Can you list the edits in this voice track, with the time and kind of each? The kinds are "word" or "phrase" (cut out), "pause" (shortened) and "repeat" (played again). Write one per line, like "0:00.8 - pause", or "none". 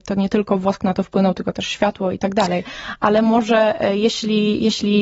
none